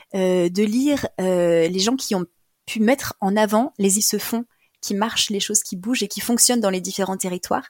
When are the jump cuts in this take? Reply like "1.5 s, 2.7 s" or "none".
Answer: 4.0 s